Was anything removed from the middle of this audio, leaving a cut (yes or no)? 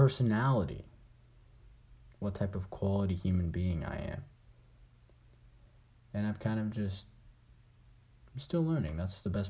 no